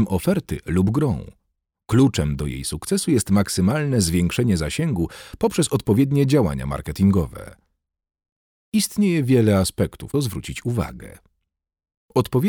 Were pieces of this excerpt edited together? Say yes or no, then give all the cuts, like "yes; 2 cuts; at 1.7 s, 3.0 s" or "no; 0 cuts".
yes; 1 cut; at 10.1 s